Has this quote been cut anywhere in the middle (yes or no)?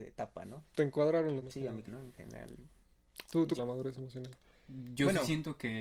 yes